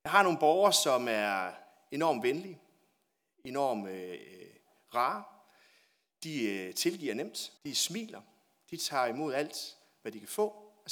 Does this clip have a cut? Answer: yes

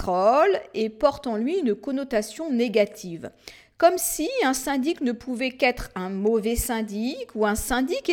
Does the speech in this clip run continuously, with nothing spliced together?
yes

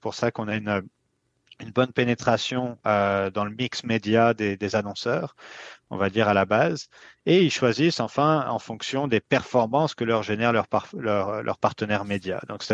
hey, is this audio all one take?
yes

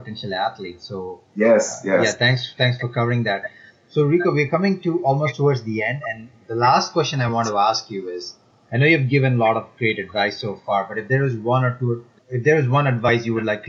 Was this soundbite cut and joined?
no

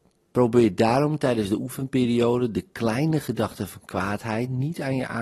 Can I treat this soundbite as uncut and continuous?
yes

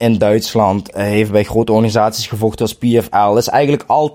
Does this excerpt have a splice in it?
no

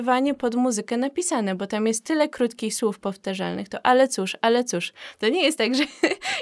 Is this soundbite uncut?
yes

